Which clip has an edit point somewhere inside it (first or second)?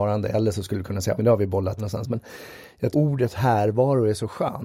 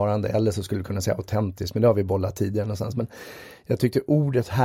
first